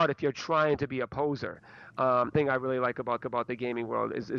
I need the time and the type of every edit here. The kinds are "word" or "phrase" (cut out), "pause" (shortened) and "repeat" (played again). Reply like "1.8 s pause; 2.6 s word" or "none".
2.3 s phrase; 3.2 s repeat